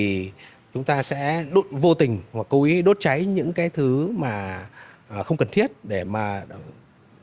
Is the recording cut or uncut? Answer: uncut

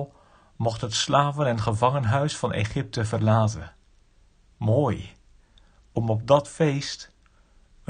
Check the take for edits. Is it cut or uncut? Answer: uncut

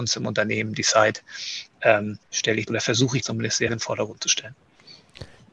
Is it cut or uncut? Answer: cut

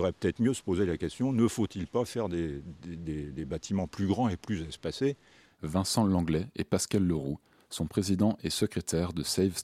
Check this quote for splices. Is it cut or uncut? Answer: uncut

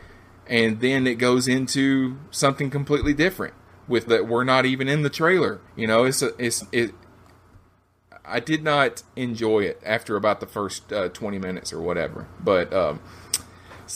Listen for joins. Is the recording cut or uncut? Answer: cut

